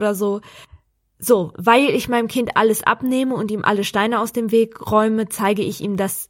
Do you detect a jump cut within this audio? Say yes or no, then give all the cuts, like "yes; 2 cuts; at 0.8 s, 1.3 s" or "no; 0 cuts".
no; 0 cuts